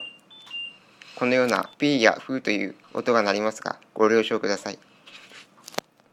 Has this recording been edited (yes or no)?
yes